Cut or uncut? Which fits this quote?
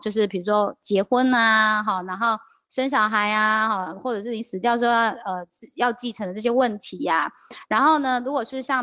uncut